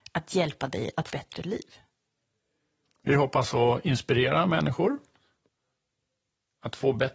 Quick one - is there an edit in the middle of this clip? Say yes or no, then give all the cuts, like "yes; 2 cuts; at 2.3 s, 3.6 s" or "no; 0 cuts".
yes; 1 cut; at 1.1 s